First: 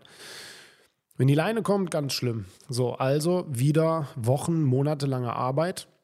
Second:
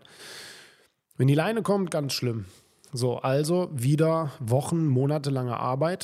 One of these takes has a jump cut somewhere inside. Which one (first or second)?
first